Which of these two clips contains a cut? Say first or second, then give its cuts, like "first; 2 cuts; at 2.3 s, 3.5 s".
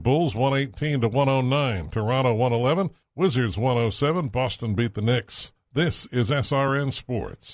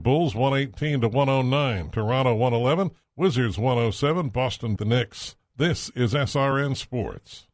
second; 1 cut; at 4.8 s